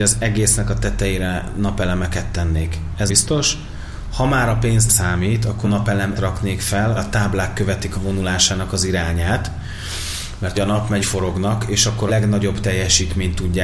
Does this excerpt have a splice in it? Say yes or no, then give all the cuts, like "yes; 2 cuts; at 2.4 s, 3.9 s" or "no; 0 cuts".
yes; 9 cuts; at 3.1 s, 4.9 s, 5.6 s, 6.2 s, 7.0 s, 7.9 s, 10.5 s, 11.0 s, 12.1 s